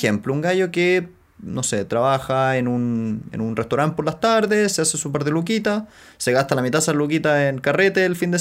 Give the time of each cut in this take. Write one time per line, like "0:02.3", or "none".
none

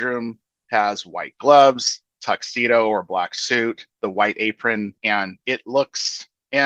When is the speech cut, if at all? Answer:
0:03.9
0:05.0

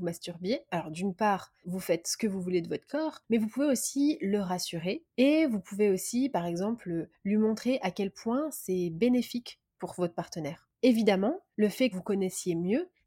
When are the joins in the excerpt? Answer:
0:01.6
0:11.9

